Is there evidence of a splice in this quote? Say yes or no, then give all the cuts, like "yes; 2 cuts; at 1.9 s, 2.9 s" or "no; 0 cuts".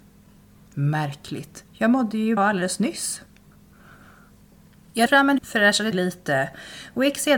yes; 5 cuts; at 1.7 s, 2.4 s, 5.1 s, 5.4 s, 5.9 s